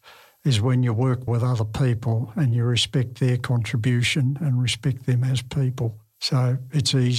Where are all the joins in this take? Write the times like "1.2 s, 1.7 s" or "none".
1.3 s